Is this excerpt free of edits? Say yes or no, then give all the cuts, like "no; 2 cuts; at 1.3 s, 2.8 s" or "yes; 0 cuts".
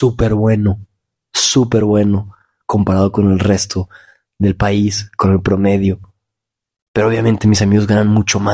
yes; 0 cuts